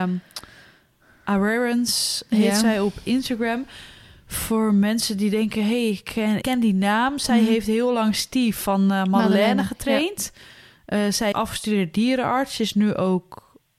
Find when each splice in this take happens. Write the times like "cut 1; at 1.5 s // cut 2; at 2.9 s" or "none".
cut 1; at 6.4 s // cut 2; at 11.3 s